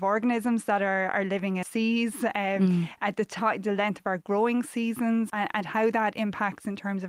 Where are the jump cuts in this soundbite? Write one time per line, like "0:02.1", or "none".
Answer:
0:01.6
0:05.3